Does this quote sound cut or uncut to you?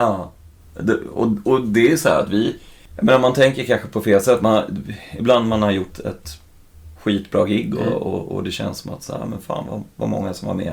cut